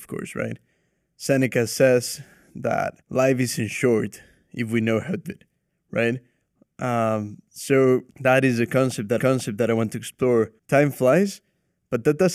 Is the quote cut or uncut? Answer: cut